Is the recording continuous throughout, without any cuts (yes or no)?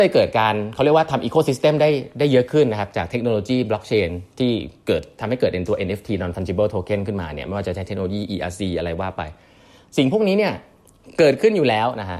yes